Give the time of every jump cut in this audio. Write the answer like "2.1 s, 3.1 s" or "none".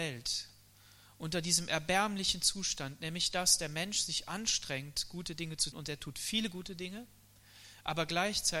5.7 s

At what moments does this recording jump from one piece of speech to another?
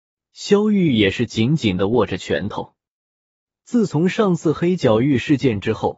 none

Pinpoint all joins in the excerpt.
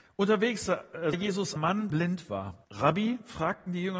1.1 s, 1.6 s, 1.9 s, 2.6 s

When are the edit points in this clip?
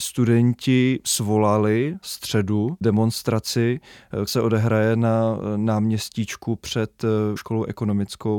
2.0 s, 4.3 s, 7.4 s

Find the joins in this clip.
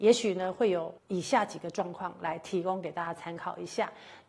1.0 s

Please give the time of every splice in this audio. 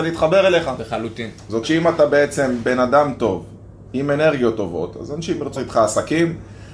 1.6 s, 5.6 s

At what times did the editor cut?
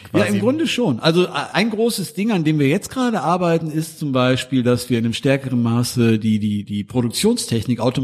none

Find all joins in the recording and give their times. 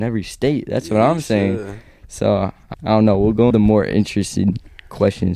2.7 s, 3.5 s

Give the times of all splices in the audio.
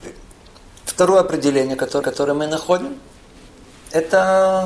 2.0 s

